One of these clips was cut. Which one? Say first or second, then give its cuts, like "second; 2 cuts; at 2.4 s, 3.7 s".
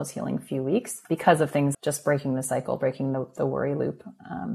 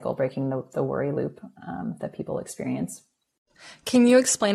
first; 2 cuts; at 1.0 s, 1.7 s